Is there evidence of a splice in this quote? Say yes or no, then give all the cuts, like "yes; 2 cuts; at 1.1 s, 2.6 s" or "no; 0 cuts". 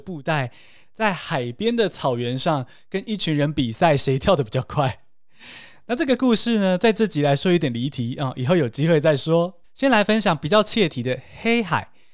yes; 1 cut; at 9.6 s